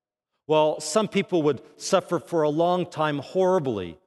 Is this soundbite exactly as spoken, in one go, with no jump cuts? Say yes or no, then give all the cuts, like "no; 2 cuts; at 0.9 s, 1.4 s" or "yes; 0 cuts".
yes; 0 cuts